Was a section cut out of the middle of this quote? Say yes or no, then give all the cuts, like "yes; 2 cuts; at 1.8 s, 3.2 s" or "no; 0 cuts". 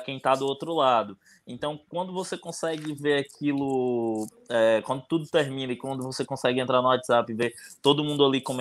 no; 0 cuts